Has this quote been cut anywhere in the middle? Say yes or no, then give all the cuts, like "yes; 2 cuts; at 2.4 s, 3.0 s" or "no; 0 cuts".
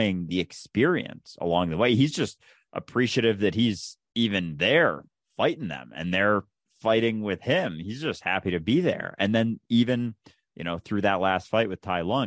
no; 0 cuts